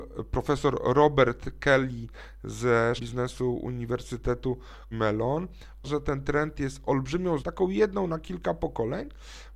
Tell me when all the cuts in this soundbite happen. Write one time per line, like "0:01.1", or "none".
0:03.0
0:04.9
0:05.8
0:07.4